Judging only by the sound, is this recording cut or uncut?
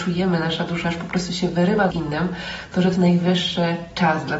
cut